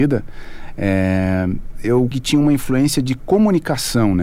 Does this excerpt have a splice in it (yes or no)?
yes